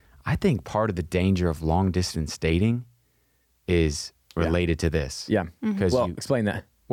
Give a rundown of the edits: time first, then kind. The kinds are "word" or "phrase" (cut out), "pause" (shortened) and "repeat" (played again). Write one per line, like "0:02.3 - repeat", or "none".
none